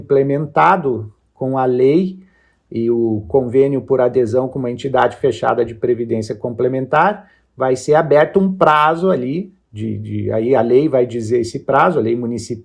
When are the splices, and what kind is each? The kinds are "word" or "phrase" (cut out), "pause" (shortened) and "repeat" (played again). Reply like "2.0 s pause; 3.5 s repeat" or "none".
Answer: none